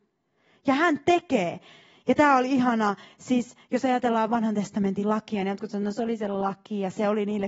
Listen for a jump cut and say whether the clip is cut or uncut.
uncut